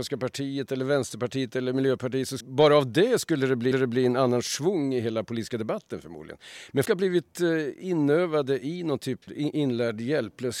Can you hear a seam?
yes; 4 cuts; at 2.4 s, 3.7 s, 6.8 s, 9.2 s

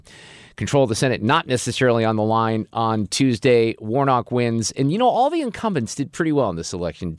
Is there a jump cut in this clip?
no; 0 cuts

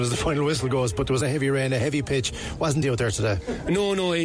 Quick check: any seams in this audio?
yes; 2 cuts; at 1.2 s, 2.8 s

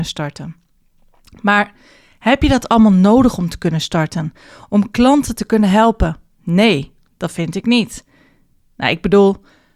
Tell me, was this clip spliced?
no; 0 cuts

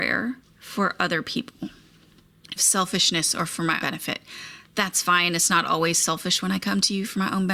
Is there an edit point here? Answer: yes; 2 cuts; at 2.6 s, 3.8 s

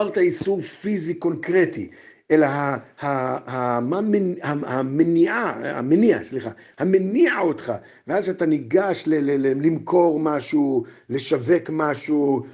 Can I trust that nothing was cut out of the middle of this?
yes; 0 cuts

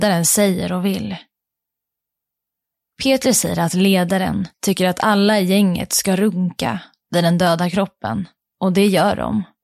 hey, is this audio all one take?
no; 2 cuts; at 4.5 s, 8.4 s

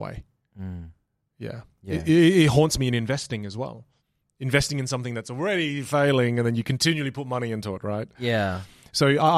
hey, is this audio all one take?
yes; 0 cuts

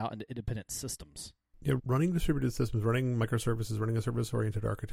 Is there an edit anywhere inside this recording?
yes; 1 cut; at 1.8 s

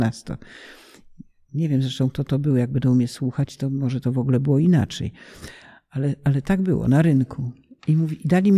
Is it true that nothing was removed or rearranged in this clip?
yes; 0 cuts

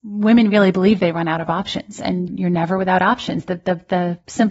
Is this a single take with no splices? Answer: no; 1 cut; at 2.3 s

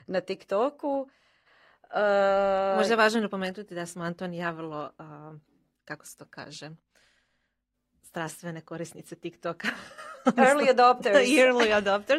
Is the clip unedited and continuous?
yes; 0 cuts

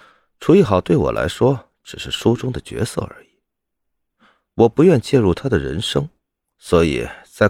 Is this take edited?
no; 0 cuts

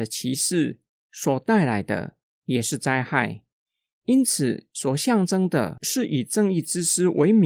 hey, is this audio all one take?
yes; 0 cuts

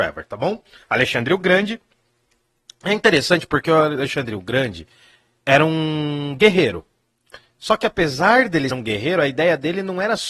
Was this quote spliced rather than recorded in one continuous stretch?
yes; 1 cut; at 8.7 s

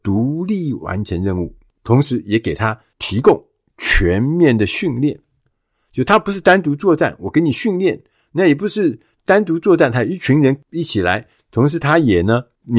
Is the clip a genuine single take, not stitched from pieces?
yes; 0 cuts

